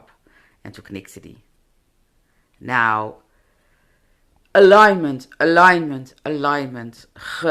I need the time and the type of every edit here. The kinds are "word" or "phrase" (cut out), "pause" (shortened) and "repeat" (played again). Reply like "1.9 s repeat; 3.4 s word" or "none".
none